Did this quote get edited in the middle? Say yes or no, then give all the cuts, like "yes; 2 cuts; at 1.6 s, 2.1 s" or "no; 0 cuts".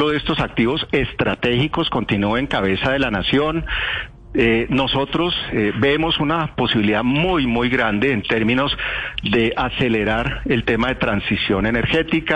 no; 0 cuts